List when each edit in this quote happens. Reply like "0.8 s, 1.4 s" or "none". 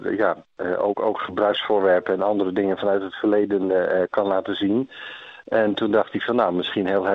none